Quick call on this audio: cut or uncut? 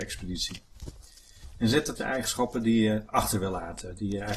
cut